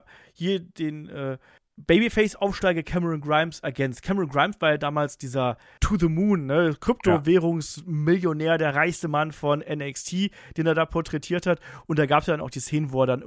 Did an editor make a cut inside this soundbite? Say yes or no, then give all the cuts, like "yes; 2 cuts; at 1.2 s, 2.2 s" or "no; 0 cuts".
yes; 2 cuts; at 1.6 s, 5.8 s